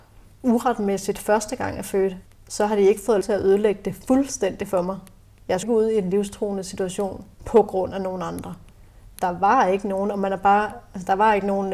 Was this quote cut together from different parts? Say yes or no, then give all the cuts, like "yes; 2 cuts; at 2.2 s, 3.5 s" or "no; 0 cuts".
yes; 4 cuts; at 2.3 s, 3.2 s, 5.6 s, 7.3 s